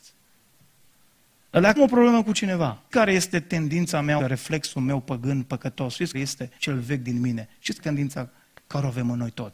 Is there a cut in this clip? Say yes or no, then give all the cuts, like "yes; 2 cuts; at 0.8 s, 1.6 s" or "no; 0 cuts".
yes; 6 cuts; at 1.8 s, 2.9 s, 4.2 s, 6.1 s, 6.6 s, 7.8 s